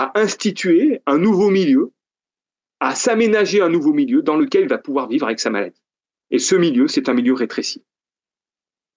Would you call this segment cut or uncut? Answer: uncut